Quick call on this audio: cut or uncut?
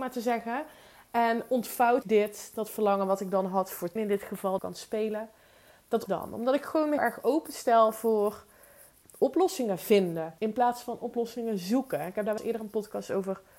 cut